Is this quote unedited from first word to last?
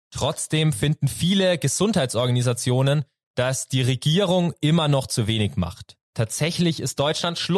no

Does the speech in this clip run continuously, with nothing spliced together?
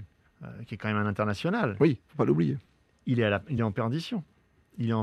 yes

